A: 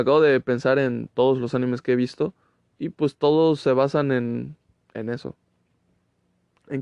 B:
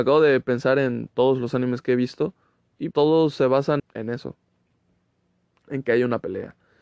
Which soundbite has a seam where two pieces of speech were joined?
B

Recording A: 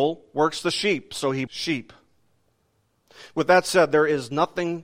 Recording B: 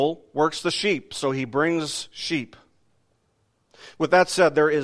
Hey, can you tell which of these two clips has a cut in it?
A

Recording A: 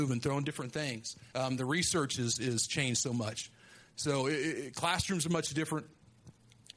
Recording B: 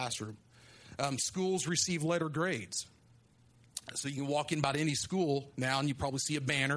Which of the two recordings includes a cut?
A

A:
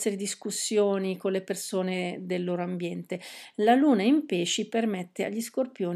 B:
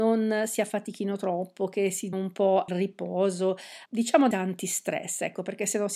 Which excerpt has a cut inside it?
B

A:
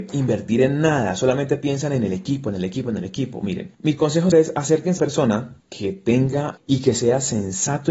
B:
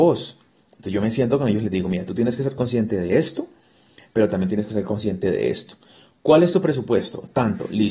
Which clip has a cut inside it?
A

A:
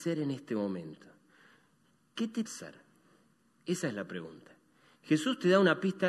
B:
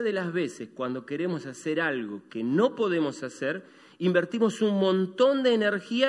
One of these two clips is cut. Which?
A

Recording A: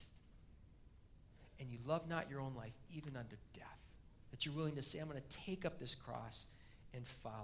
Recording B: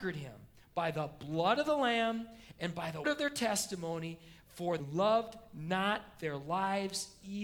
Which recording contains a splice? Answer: B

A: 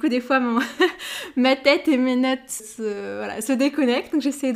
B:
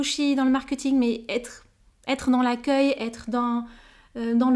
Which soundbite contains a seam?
A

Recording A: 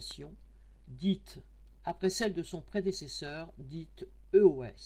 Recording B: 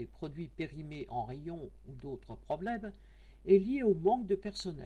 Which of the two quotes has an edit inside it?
A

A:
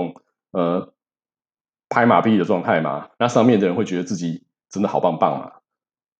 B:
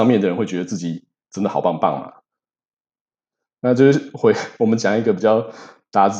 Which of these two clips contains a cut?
A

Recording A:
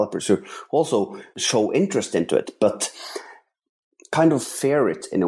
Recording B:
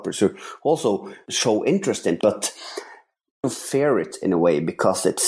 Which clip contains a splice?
B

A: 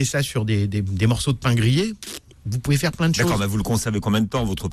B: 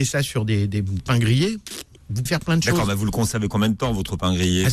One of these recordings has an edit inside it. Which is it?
B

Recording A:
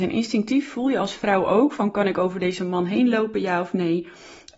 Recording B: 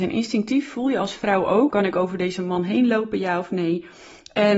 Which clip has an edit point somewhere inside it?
B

